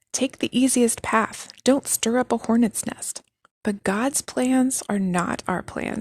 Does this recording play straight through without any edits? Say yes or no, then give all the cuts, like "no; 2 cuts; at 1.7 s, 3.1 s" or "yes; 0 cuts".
no; 1 cut; at 3.4 s